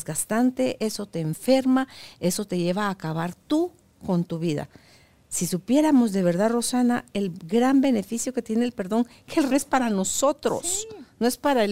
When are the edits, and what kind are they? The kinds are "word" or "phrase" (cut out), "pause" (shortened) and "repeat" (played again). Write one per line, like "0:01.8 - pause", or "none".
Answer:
0:09.5 - phrase

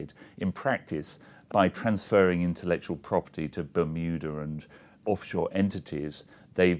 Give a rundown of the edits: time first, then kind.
none

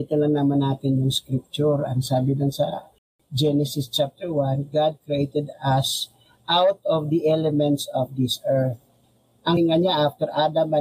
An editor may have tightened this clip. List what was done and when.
0:09.6 - word

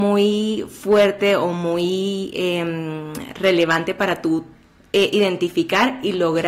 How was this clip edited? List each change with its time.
none

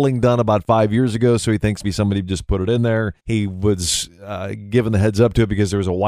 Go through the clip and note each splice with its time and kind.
0:01.8 - word
0:03.2 - pause

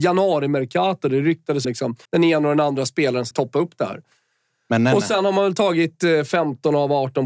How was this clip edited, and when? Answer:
0:01.6 - word
0:02.0 - pause
0:03.3 - word

